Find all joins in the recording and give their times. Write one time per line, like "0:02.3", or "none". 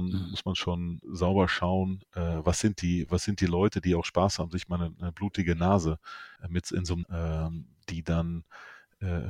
0:01.0
0:06.4
0:07.0